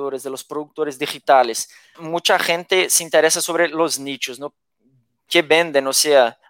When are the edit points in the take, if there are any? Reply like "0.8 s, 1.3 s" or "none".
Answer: 1.9 s